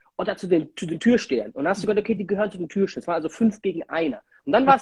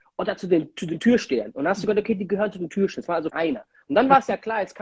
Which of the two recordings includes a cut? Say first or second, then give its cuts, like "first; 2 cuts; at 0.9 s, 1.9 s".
second; 1 cut; at 3.3 s